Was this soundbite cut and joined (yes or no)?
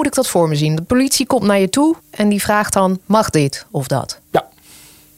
yes